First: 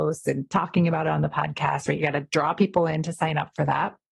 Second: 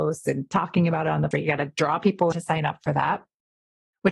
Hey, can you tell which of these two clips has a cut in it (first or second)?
second